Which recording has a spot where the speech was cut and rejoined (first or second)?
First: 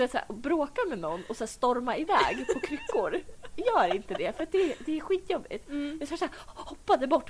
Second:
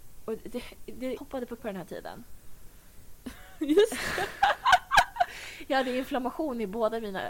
second